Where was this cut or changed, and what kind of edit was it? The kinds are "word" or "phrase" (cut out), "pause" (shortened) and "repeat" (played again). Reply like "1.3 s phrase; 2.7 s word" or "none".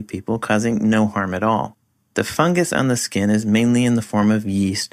none